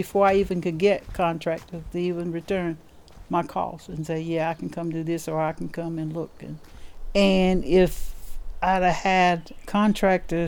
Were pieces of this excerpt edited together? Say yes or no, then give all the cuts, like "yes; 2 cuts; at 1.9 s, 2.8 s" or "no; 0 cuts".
no; 0 cuts